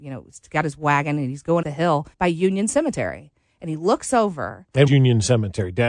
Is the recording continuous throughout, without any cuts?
no; 3 cuts; at 1.6 s, 2.1 s, 4.9 s

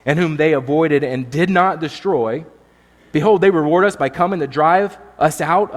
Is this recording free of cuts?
yes; 0 cuts

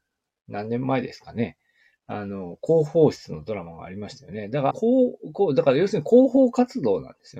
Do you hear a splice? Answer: yes; 1 cut; at 4.7 s

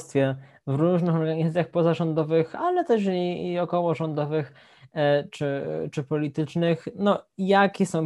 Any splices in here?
no; 0 cuts

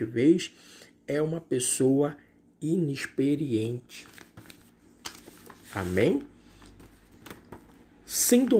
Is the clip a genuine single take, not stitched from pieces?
yes; 0 cuts

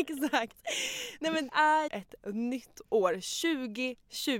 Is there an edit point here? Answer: yes; 2 cuts; at 1.5 s, 1.9 s

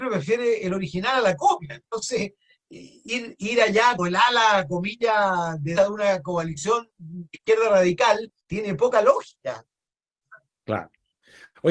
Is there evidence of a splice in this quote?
yes; 4 cuts; at 2.6 s, 4.0 s, 5.8 s, 8.4 s

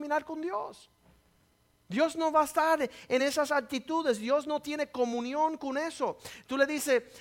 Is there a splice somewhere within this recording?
no; 0 cuts

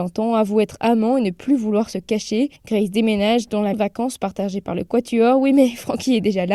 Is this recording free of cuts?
no; 2 cuts; at 2.6 s, 3.7 s

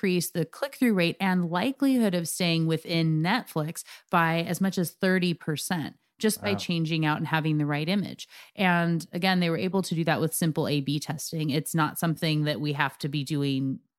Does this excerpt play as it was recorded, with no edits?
yes; 0 cuts

